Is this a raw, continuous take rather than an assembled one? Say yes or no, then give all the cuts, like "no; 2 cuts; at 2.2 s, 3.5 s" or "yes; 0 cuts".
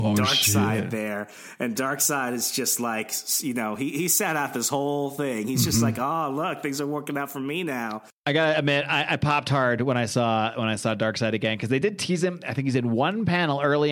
yes; 0 cuts